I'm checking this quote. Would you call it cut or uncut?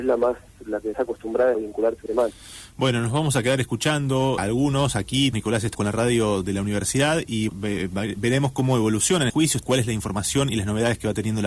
cut